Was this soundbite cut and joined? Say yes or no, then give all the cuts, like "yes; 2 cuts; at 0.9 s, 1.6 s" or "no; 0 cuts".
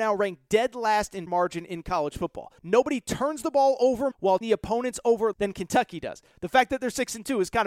yes; 5 cuts; at 1.3 s, 2.6 s, 4.1 s, 4.4 s, 5.3 s